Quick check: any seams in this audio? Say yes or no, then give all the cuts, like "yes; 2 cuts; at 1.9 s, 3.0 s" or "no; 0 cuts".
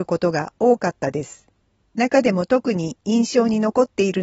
yes; 1 cut; at 1.6 s